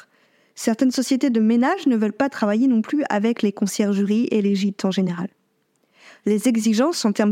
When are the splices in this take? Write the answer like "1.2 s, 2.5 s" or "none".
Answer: none